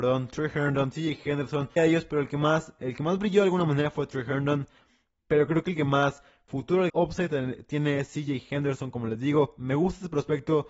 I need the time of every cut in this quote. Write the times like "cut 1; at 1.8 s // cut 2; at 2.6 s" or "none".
cut 1; at 1.8 s // cut 2; at 6.9 s